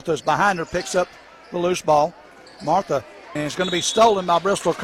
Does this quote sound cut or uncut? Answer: cut